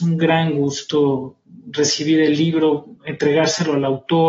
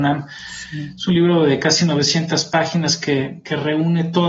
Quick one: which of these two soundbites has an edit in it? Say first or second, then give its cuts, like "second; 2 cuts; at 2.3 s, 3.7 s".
first; 1 cut; at 3.0 s